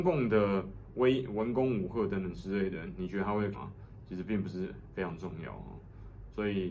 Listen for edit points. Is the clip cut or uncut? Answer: cut